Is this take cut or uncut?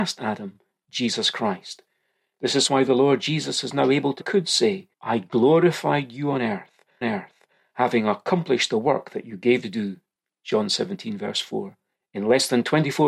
cut